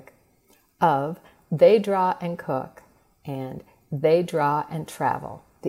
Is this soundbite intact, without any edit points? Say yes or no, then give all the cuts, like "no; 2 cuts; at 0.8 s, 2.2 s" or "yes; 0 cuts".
yes; 0 cuts